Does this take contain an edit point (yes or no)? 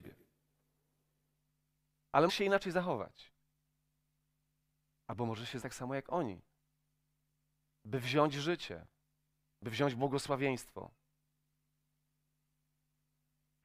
yes